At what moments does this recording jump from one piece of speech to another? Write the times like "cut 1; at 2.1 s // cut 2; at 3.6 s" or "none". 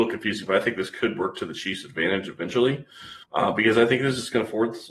cut 1; at 3.2 s